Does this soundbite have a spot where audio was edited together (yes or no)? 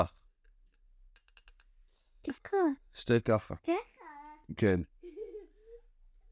yes